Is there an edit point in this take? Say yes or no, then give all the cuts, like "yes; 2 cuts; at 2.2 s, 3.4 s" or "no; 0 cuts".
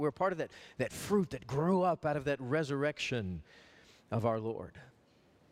no; 0 cuts